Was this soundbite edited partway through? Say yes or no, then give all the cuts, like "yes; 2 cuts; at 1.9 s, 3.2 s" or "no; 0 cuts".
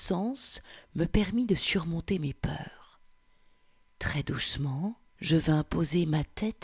yes; 1 cut; at 5.1 s